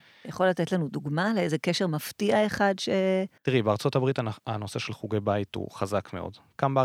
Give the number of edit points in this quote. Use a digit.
1